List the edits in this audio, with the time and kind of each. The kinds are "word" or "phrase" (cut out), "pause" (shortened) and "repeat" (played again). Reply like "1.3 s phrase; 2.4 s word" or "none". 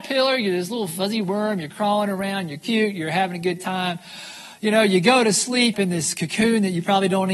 5.7 s phrase